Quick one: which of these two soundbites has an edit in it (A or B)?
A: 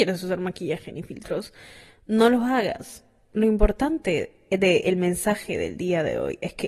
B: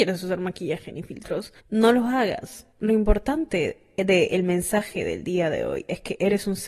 B